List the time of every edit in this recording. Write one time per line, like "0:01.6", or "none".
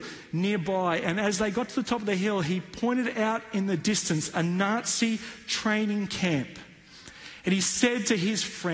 none